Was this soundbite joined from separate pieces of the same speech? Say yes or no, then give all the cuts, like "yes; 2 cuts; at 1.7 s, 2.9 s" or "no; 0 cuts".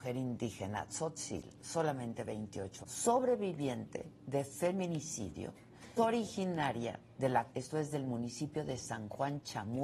yes; 4 cuts; at 1.6 s, 2.8 s, 6.0 s, 7.5 s